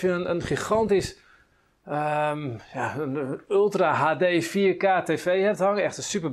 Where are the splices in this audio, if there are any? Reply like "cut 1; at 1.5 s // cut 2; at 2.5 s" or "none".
none